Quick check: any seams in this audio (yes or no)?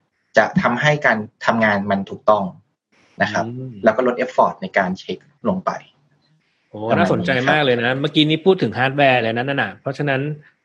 no